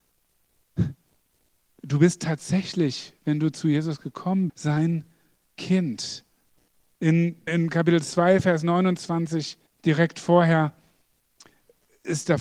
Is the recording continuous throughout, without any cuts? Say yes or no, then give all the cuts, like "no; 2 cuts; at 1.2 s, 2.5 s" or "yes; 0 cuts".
no; 3 cuts; at 4.5 s, 7.5 s, 9.7 s